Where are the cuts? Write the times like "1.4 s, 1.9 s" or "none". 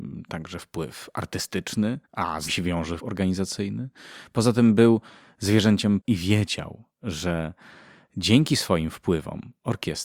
2.0 s, 2.5 s, 3.0 s, 6.0 s